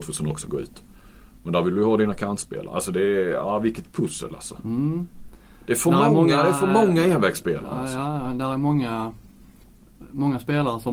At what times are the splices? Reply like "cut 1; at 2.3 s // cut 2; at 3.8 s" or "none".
none

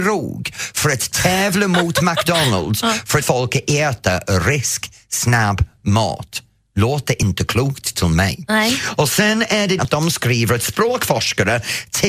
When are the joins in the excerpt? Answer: cut 1; at 3.2 s // cut 2; at 9.8 s

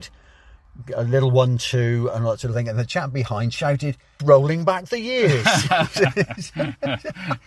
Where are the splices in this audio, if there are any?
cut 1; at 4.2 s

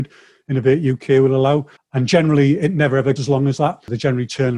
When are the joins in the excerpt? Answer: cut 1; at 1.8 s // cut 2; at 3.2 s

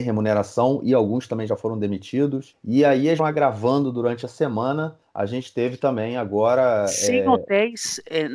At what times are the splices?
cut 1; at 3.2 s

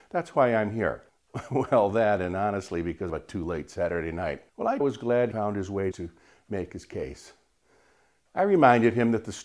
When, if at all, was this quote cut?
cut 1; at 1.1 s // cut 2; at 3.1 s // cut 3; at 4.5 s // cut 4; at 4.8 s // cut 5; at 5.3 s // cut 6; at 5.9 s

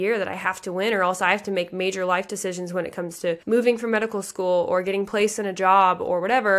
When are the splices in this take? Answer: cut 1; at 3.4 s

